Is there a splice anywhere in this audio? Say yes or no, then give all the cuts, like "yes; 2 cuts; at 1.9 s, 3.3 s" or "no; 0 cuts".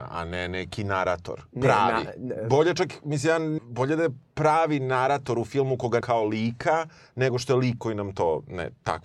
yes; 3 cuts; at 3.6 s, 6.0 s, 7.8 s